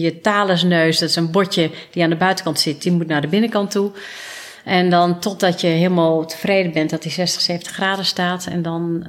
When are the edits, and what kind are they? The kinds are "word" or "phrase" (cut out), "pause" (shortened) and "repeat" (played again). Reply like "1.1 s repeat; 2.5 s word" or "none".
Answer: none